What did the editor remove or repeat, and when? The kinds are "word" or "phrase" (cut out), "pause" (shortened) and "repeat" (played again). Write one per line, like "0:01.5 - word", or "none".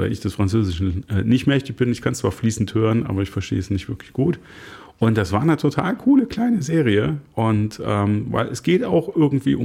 none